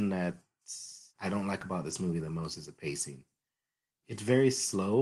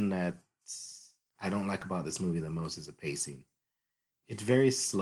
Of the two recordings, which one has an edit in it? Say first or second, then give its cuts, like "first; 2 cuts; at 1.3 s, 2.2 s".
first; 1 cut; at 1.1 s